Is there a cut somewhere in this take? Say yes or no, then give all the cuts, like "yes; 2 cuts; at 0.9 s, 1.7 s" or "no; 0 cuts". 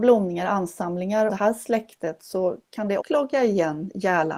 yes; 2 cuts; at 1.3 s, 3.0 s